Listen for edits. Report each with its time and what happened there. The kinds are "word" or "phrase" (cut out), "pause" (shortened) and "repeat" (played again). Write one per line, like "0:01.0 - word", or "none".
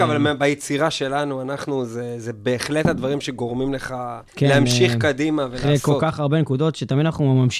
0:04.3 - pause